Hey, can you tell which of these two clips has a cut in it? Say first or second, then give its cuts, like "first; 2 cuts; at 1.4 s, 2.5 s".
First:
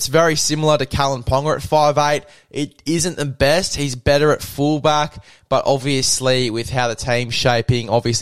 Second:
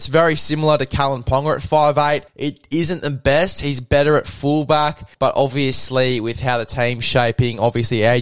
second; 2 cuts; at 2.3 s, 5.1 s